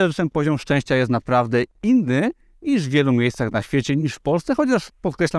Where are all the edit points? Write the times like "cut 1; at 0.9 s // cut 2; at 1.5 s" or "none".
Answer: none